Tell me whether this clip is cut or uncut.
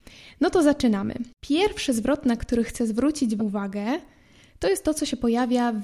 cut